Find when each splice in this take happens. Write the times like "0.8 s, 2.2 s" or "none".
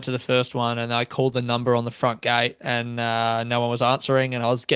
none